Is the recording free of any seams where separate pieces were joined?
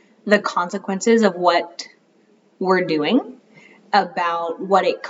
yes; 0 cuts

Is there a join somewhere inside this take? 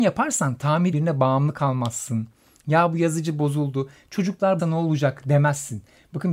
yes; 2 cuts; at 0.9 s, 4.6 s

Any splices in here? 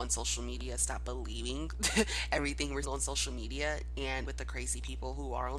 yes; 2 cuts; at 2.8 s, 4.2 s

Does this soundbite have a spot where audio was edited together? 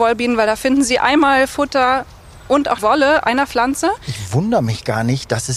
yes; 2 cuts; at 2.8 s, 3.2 s

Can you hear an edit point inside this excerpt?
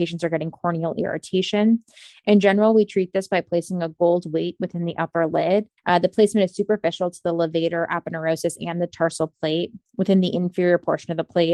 yes; 1 cut; at 5.8 s

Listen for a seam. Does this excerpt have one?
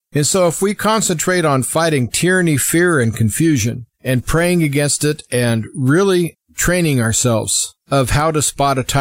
yes; 3 cuts; at 3.9 s, 6.4 s, 7.8 s

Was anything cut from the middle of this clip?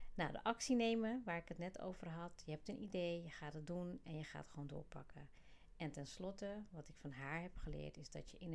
no; 0 cuts

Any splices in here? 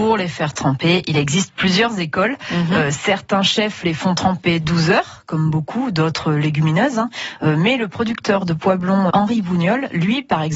yes; 1 cut; at 9.1 s

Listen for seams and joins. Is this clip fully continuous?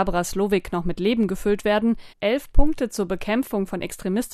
no; 1 cut; at 2.1 s

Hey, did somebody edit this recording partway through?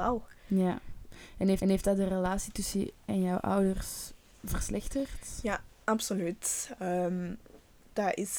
yes; 2 cuts; at 1.6 s, 3.1 s

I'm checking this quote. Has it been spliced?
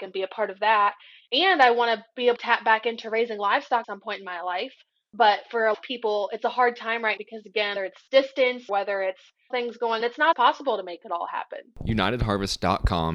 yes; 9 cuts; at 2.4 s, 3.8 s, 5.7 s, 7.2 s, 7.8 s, 8.7 s, 9.5 s, 10.0 s, 10.3 s

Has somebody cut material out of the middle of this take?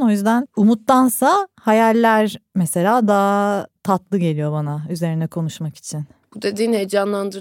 yes; 1 cut; at 6.2 s

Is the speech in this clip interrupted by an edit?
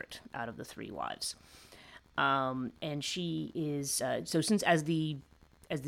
no; 0 cuts

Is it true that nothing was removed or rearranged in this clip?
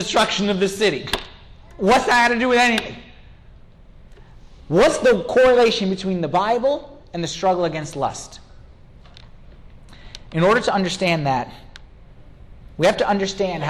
yes; 0 cuts

